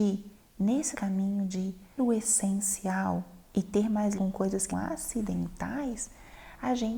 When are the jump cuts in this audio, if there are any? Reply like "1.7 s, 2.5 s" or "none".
0.9 s, 2.0 s, 3.5 s, 4.2 s, 4.7 s